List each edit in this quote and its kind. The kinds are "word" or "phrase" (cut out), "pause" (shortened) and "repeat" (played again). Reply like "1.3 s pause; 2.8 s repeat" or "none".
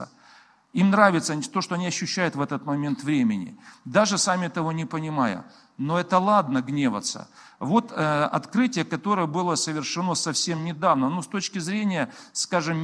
none